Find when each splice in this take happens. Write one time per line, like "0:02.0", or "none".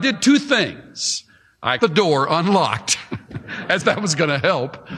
0:01.8
0:03.8